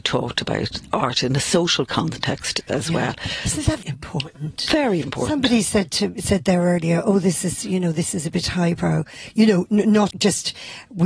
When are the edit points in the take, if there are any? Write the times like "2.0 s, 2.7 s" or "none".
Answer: 3.8 s, 5.0 s, 10.1 s

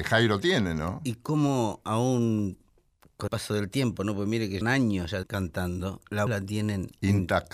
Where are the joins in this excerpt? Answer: 3.3 s, 4.6 s, 5.2 s, 6.3 s

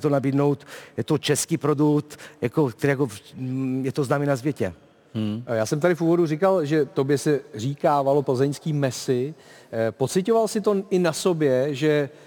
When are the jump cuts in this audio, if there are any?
none

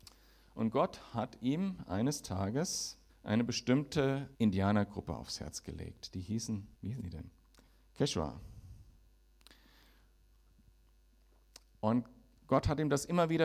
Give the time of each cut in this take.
3.1 s, 4.3 s, 6.7 s, 7.7 s

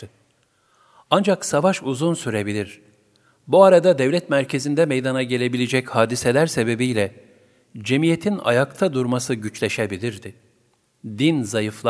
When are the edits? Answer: none

